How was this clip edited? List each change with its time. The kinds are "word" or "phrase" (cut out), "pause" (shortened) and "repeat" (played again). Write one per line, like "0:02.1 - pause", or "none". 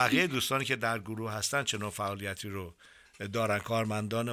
none